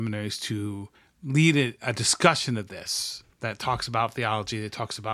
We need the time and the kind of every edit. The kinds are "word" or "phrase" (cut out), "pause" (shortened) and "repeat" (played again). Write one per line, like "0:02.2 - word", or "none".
0:00.9 - pause
0:03.3 - pause